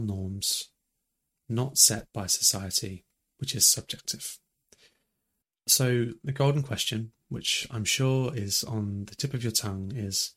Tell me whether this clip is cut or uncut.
uncut